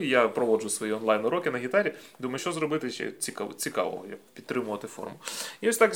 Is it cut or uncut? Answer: cut